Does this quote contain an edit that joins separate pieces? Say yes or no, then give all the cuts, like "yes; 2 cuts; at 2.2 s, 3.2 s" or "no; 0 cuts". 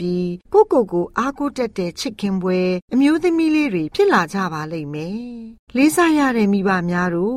yes; 1 cut; at 5.7 s